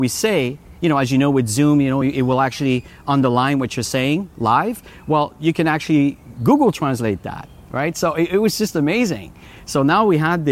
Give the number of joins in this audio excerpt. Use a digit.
0